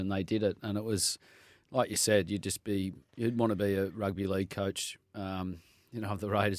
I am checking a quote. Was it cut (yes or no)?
no